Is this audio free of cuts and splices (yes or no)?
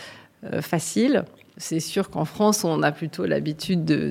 yes